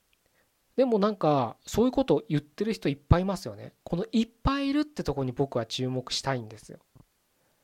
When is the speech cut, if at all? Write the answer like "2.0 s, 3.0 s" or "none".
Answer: 3.8 s